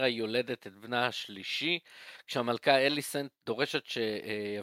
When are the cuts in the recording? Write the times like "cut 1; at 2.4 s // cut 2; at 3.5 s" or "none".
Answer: none